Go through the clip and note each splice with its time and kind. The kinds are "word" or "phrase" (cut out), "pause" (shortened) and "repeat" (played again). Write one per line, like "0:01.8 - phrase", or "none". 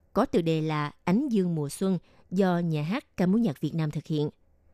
none